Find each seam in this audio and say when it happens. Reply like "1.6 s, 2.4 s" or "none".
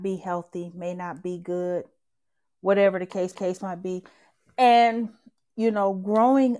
3.3 s